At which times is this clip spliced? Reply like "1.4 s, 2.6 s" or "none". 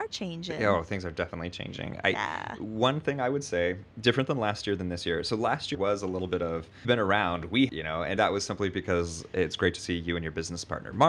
3.9 s, 5.7 s, 6.8 s, 7.7 s, 8.2 s